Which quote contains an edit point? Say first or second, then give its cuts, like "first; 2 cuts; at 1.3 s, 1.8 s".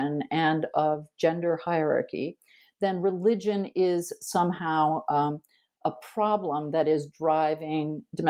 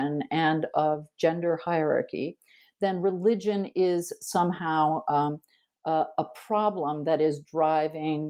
first; 1 cut; at 5.8 s